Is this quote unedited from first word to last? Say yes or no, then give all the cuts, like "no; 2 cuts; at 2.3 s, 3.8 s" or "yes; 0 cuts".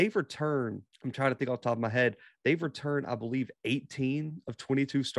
no; 1 cut; at 0.9 s